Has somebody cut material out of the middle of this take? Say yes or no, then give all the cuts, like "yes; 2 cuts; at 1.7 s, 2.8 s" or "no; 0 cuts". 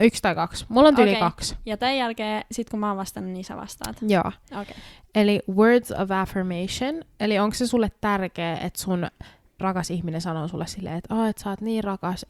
yes; 1 cut; at 9.6 s